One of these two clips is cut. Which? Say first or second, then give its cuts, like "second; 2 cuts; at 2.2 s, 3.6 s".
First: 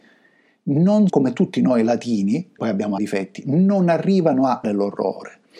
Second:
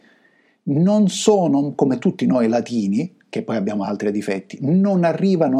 first; 4 cuts; at 1.1 s, 2.6 s, 3.0 s, 4.6 s